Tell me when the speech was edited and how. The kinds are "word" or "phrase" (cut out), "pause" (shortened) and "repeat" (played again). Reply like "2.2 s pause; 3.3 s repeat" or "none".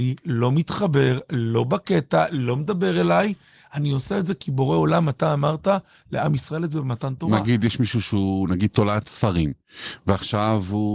none